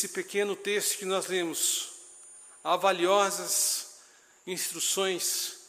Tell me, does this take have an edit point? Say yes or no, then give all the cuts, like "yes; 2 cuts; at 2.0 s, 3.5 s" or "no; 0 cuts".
no; 0 cuts